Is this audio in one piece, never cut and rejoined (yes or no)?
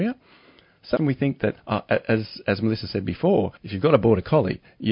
no